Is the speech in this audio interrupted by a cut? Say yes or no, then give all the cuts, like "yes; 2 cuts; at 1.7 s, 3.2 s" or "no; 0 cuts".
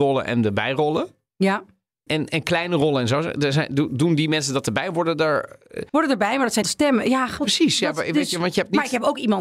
yes; 4 cuts; at 2.1 s, 5.9 s, 6.6 s, 7.4 s